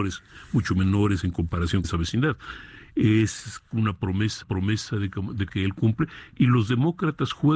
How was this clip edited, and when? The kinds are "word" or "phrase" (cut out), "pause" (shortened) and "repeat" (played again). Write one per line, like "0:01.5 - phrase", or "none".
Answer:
0:01.8 - word
0:04.4 - repeat
0:05.5 - word